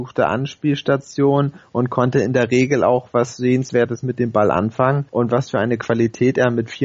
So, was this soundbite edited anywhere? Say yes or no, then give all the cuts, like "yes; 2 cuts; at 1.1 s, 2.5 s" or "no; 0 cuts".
yes; 1 cut; at 5.1 s